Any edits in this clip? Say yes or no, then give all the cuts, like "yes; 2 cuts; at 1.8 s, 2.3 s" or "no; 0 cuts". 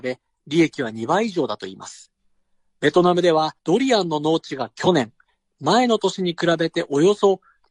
yes; 1 cut; at 3.6 s